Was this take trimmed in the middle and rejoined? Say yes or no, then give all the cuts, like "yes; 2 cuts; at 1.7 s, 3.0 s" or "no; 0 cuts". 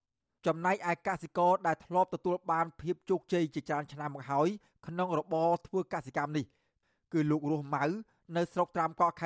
no; 0 cuts